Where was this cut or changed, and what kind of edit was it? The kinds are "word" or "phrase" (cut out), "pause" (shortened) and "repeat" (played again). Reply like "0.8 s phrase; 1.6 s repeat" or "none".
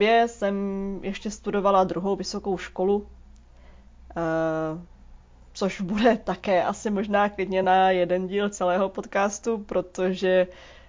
none